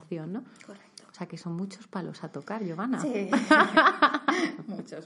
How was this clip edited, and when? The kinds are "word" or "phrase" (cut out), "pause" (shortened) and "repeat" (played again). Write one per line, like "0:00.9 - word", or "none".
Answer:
none